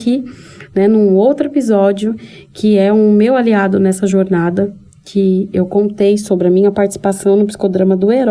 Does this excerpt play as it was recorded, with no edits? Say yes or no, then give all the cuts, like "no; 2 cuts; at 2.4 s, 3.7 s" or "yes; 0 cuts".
yes; 0 cuts